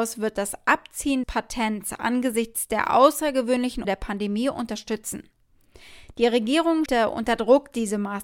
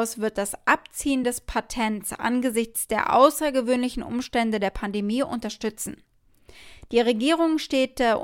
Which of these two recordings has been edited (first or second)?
first